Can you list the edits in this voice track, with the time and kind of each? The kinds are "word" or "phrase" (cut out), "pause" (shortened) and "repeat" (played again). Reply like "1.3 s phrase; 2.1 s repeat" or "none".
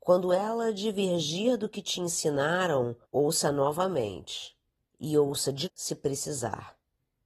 3.0 s pause; 4.8 s pause; 5.7 s word